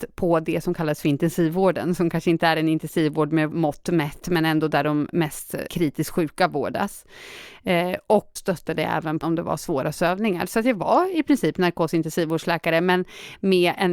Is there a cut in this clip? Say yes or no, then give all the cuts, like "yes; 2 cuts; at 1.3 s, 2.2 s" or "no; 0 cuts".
yes; 4 cuts; at 3.5 s, 5.7 s, 8.4 s, 9.2 s